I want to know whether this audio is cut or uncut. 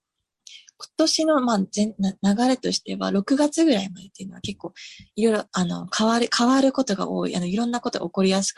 cut